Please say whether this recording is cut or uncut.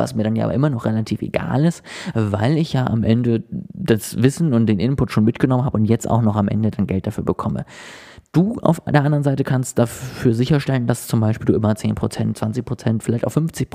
uncut